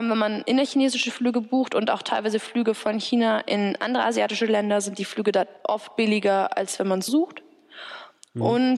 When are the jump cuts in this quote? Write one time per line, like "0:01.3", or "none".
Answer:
0:05.6
0:07.1